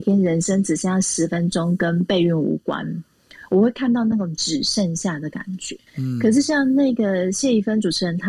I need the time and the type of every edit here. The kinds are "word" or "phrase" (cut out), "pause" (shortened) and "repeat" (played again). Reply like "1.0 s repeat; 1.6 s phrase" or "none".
5.9 s pause